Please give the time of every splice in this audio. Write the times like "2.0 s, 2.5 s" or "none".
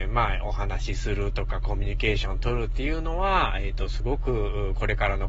none